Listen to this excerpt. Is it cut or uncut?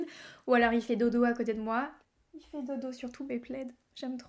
cut